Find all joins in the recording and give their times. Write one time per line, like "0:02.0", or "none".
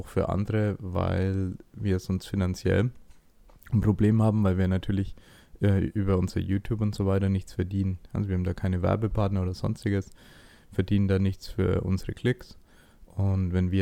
none